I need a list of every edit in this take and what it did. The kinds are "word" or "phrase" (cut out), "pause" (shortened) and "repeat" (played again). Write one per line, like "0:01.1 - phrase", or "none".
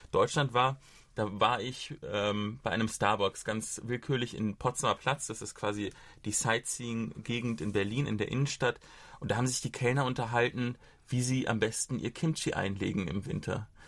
none